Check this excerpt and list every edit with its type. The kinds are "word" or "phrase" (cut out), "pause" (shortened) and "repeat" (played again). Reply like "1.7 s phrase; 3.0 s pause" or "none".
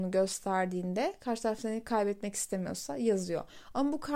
none